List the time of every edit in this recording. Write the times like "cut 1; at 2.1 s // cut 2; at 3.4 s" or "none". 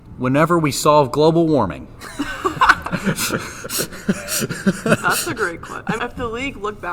cut 1; at 6.0 s